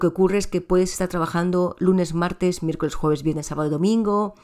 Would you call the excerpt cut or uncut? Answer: uncut